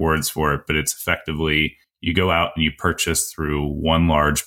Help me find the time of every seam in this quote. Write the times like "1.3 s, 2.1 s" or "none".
1.8 s